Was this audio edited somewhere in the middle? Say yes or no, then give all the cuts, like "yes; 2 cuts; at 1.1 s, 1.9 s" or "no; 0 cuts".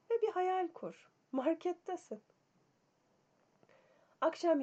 no; 0 cuts